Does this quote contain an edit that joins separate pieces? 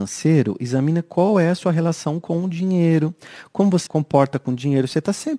yes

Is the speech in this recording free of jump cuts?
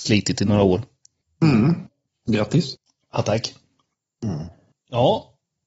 yes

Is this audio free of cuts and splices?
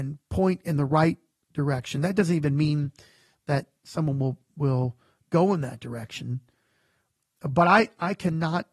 yes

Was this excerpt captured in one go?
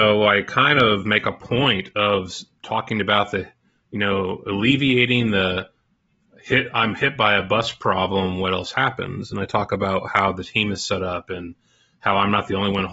yes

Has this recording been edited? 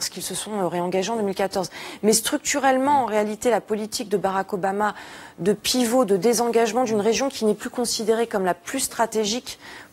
no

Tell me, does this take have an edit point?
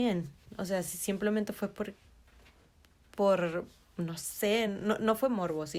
no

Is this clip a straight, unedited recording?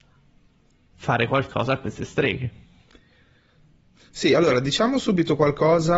yes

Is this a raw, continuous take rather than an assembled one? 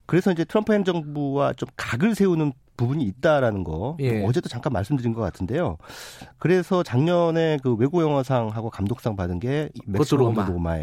yes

